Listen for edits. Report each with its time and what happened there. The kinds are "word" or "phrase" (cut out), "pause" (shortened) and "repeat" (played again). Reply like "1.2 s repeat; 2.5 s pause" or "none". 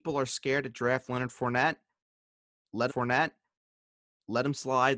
2.9 s repeat